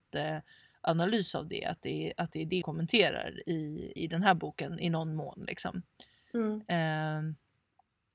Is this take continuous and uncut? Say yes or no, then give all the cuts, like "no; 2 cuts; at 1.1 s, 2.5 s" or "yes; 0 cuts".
no; 2 cuts; at 2.6 s, 4.0 s